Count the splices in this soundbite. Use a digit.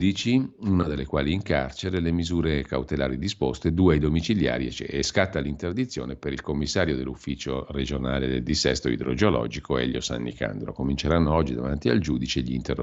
0